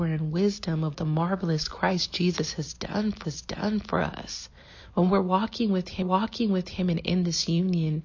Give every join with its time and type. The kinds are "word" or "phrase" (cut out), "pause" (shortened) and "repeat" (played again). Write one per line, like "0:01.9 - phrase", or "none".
0:00.9 - word
0:03.2 - repeat
0:06.0 - repeat